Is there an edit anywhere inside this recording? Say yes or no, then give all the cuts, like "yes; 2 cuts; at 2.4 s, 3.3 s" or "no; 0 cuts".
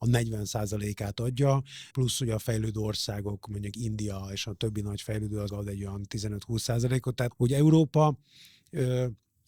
yes; 3 cuts; at 1.9 s, 5.5 s, 7.3 s